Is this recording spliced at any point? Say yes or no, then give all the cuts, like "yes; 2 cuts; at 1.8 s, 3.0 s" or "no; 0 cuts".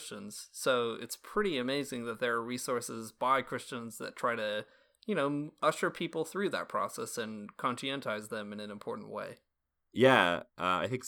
no; 0 cuts